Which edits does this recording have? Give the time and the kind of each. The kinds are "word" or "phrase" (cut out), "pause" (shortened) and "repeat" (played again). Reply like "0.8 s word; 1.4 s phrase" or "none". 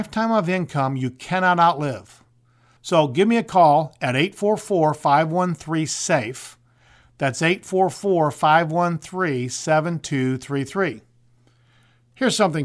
none